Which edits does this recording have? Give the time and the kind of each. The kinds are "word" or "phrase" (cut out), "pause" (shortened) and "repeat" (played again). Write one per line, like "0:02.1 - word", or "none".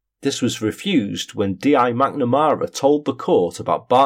none